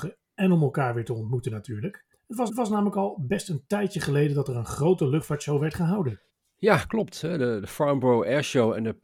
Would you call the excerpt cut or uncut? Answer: cut